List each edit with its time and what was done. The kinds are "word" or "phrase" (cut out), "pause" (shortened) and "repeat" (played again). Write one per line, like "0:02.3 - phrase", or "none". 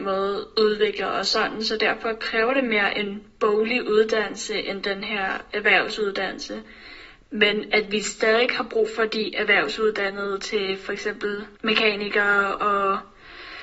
0:11.5 - pause